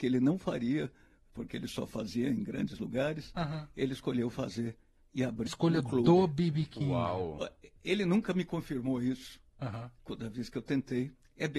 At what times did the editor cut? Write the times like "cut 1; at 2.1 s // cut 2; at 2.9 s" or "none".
cut 1; at 5.5 s

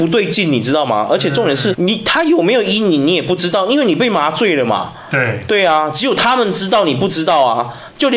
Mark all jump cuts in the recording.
cut 1; at 1.7 s

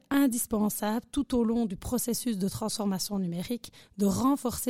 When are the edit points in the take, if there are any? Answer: none

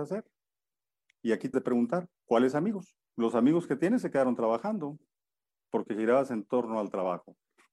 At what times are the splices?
cut 1; at 1.5 s // cut 2; at 2.2 s // cut 3; at 3.0 s

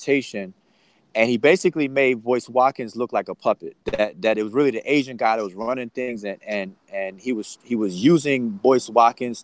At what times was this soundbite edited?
cut 1; at 3.8 s

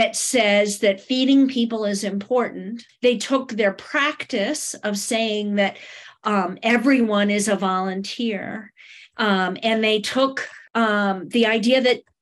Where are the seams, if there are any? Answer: cut 1; at 2.9 s // cut 2; at 10.7 s

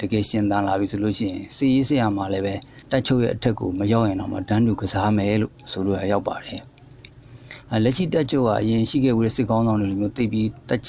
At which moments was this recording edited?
cut 1; at 2.8 s

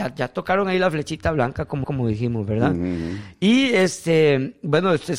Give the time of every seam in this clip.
cut 1; at 1.8 s

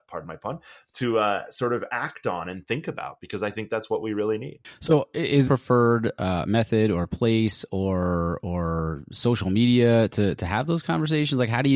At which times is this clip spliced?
cut 1; at 5.4 s

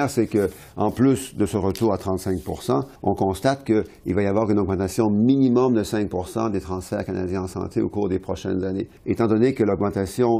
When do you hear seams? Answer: cut 1; at 3.0 s // cut 2; at 9.0 s

